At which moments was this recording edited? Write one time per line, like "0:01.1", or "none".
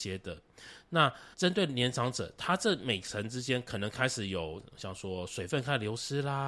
0:01.3

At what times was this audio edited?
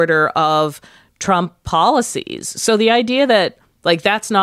none

